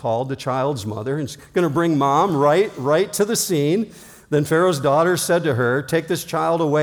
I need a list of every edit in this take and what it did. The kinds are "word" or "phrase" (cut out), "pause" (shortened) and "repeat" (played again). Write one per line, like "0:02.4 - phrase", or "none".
none